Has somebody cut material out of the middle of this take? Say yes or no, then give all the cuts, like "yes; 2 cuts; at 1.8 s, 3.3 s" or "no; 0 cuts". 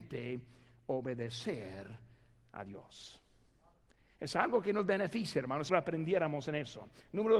yes; 1 cut; at 5.7 s